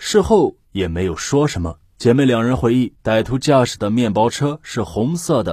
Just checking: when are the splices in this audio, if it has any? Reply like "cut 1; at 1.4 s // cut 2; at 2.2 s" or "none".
cut 1; at 1.9 s